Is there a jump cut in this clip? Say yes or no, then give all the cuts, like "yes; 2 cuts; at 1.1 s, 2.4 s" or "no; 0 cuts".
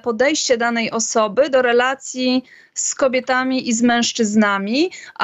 no; 0 cuts